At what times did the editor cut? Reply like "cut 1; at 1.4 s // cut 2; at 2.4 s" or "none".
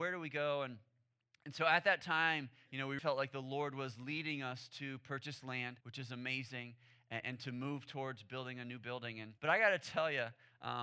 cut 1; at 3.0 s // cut 2; at 5.8 s // cut 3; at 7.2 s // cut 4; at 9.4 s